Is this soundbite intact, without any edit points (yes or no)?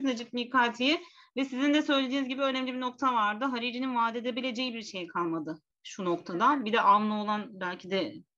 yes